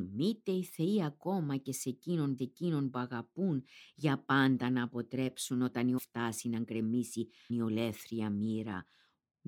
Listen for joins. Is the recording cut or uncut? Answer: cut